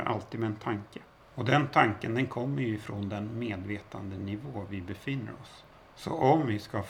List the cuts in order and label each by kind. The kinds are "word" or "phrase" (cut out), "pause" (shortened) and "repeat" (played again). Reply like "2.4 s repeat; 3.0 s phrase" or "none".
1.2 s pause; 5.7 s pause